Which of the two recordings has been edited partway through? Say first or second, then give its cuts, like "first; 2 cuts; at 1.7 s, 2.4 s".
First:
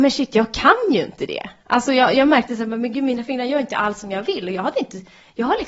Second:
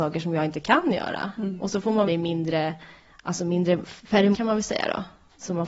second; 2 cuts; at 2.1 s, 4.3 s